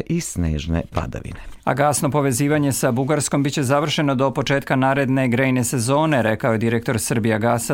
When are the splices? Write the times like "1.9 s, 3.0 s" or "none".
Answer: 1.6 s